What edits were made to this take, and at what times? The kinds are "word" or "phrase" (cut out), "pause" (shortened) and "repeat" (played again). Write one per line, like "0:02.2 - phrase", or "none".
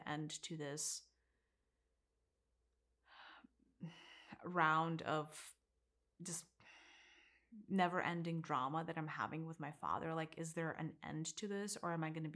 none